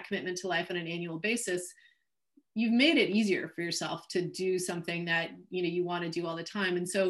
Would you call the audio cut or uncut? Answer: uncut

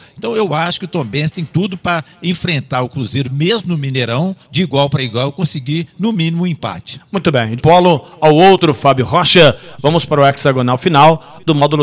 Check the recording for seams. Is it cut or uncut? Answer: cut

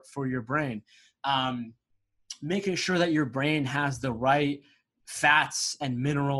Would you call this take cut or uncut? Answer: uncut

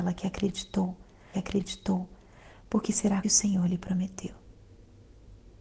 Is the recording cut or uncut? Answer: cut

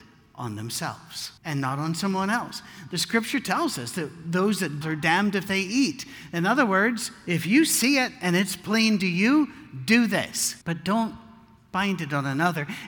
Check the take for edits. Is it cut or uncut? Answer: cut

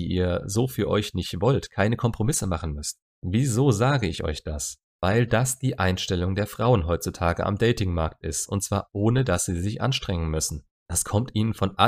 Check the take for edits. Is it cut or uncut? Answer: uncut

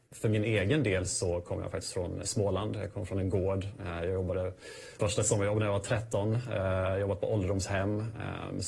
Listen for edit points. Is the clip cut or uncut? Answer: cut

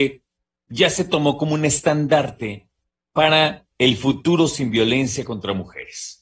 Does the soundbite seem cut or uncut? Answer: uncut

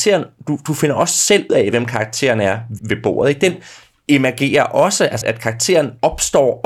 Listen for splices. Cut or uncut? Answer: cut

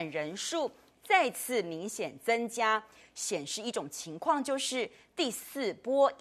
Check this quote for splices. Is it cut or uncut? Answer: uncut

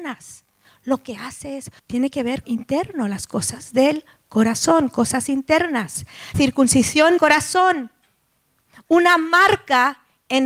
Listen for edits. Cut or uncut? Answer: cut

